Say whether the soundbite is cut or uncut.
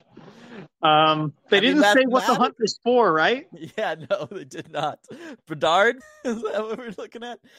cut